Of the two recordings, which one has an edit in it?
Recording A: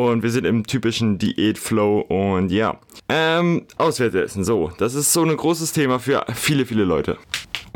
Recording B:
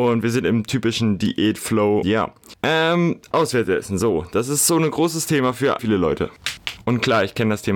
B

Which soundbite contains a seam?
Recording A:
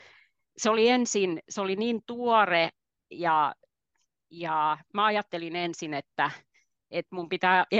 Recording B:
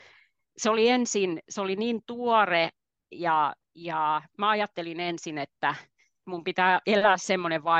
B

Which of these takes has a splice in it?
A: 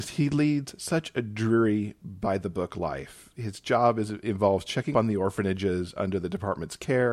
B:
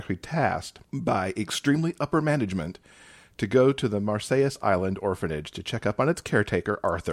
A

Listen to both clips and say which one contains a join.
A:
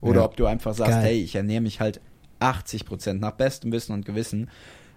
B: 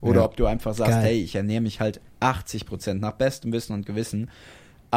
B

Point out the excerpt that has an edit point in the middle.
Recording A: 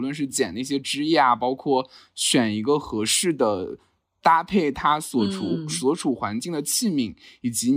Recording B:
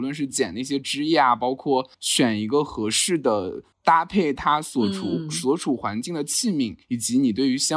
B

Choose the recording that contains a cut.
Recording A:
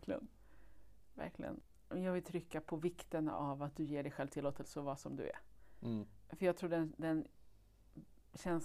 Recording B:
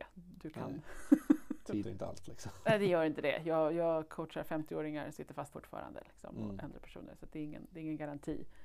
B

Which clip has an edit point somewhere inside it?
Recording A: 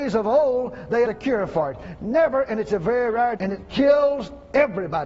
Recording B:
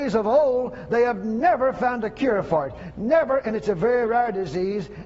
A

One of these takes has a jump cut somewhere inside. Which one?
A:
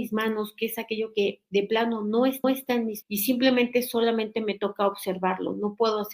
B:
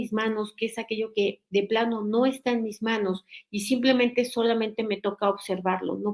A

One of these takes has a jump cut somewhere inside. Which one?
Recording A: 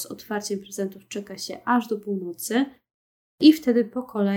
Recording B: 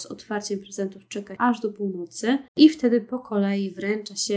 B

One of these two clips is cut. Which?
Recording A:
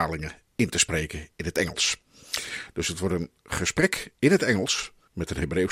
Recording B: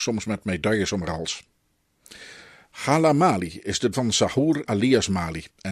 B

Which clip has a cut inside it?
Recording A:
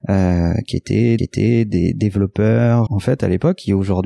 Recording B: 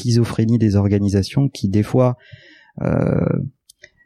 A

